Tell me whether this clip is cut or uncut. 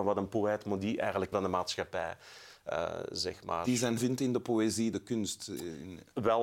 cut